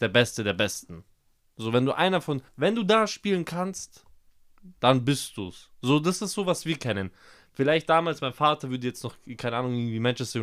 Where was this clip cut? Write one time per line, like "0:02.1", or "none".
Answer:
0:02.5